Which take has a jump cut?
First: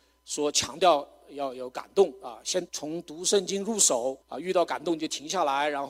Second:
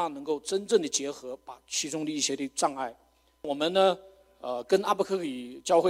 first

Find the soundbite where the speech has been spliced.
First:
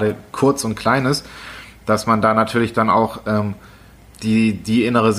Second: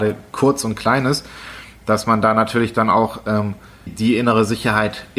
second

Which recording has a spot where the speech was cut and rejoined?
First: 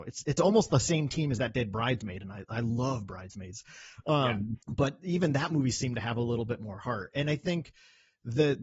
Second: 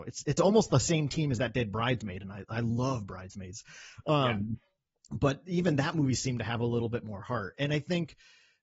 first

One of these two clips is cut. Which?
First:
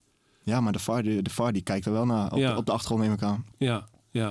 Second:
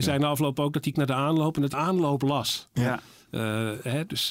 second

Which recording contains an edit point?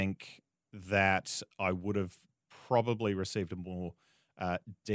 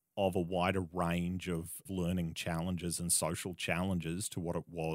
second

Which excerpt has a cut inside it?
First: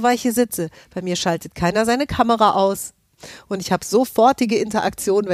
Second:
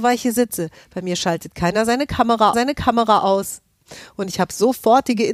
second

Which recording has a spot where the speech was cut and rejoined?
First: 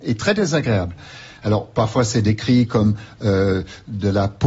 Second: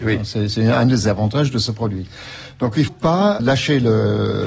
second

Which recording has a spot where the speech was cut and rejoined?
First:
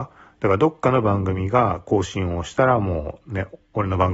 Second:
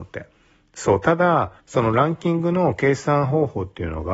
second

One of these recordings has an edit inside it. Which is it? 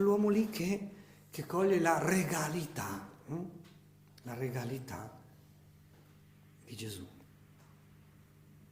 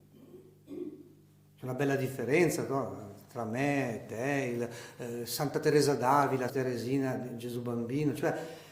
second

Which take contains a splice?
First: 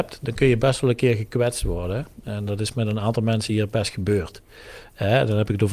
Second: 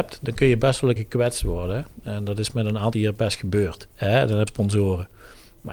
second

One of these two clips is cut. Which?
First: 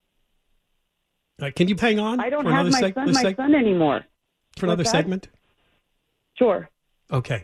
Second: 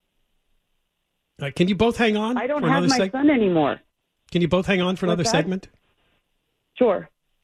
first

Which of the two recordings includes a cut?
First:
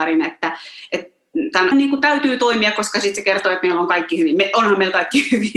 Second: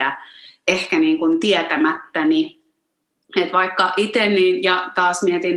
first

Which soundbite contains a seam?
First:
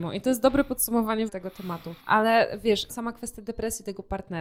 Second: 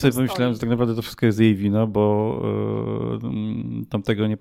first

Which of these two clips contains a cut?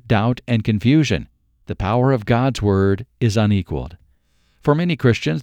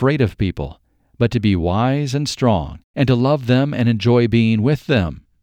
second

